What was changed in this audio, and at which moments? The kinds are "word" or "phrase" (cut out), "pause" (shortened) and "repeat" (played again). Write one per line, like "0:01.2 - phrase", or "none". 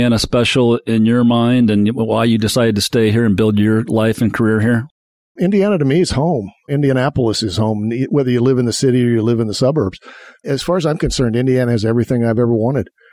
none